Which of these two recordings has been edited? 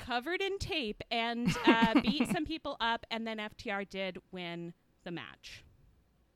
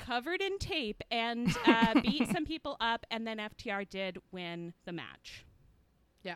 second; 1 cut; at 4.8 s

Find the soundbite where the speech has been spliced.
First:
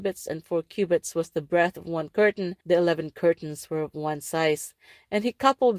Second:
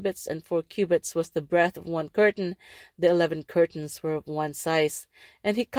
first; 1 cut; at 2.6 s

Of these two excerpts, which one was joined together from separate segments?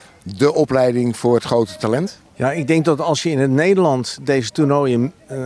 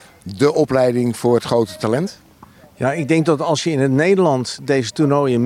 first; 1 cut; at 2.3 s

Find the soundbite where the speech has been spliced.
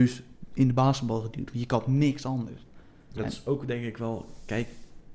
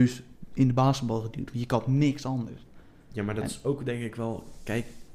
first; 1 cut; at 3.2 s

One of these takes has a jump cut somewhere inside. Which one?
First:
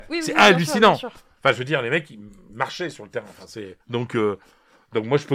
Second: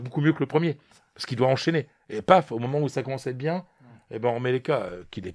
first; 1 cut; at 3.8 s

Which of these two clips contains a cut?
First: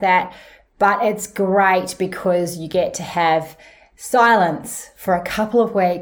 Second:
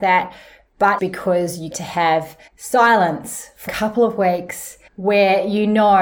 second; 5 cuts; at 1.0 s, 1.7 s, 2.5 s, 3.7 s, 4.9 s

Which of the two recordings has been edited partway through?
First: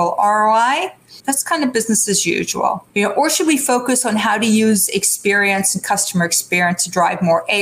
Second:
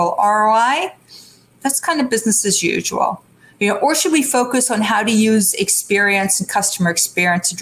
first; 2 cuts; at 1.2 s, 2.9 s

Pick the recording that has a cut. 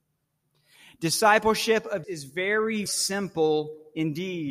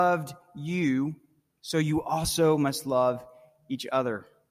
first; 2 cuts; at 2.0 s, 2.9 s

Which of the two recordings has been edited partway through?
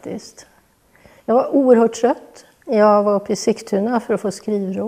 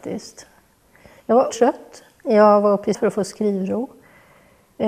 second; 2 cuts; at 1.5 s, 2.9 s

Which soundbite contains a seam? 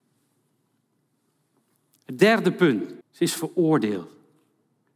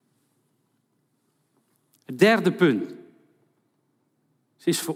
first; 1 cut; at 3.0 s

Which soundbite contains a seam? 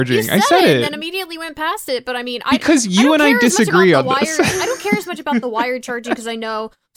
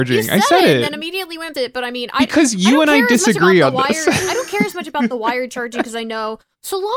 second; 1 cut; at 1.5 s

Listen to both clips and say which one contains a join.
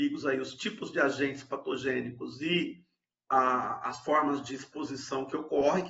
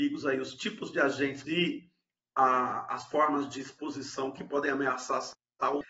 second; 2 cuts; at 1.4 s, 4.4 s

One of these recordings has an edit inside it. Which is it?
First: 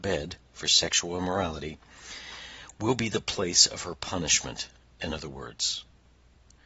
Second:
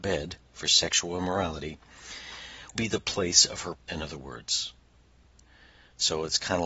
second; 2 cuts; at 2.7 s, 3.7 s

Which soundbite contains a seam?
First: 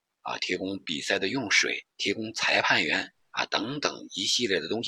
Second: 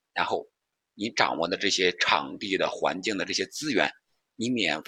first; 1 cut; at 1.9 s

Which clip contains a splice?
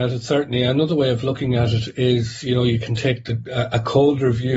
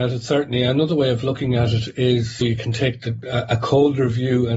second; 1 cut; at 2.4 s

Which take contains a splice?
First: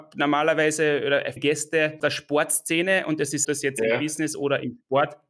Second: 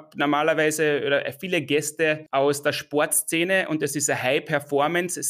first; 4 cuts; at 1.4 s, 2.0 s, 3.4 s, 4.3 s

